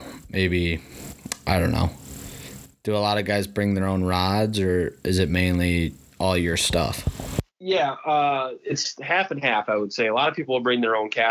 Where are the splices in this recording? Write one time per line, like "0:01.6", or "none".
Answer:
none